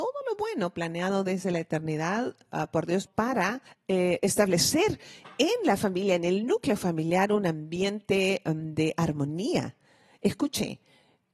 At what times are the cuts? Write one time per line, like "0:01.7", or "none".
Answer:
0:03.1
0:03.7